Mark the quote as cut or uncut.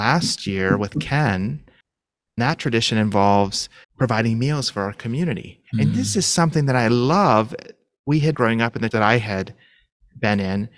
cut